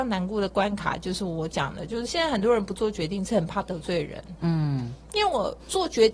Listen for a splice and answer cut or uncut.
uncut